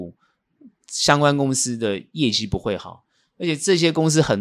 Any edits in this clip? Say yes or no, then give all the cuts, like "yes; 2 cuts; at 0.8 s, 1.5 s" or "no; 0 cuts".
no; 0 cuts